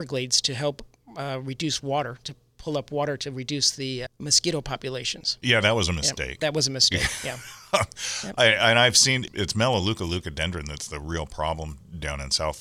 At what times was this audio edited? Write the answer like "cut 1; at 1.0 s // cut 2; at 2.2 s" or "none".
cut 1; at 4.1 s // cut 2; at 9.3 s